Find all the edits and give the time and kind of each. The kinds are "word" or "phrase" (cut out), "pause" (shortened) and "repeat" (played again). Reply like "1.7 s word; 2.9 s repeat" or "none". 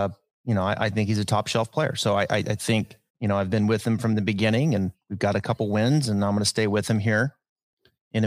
3.1 s pause